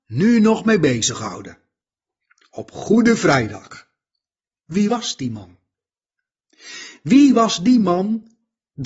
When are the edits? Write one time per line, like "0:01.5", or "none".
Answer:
none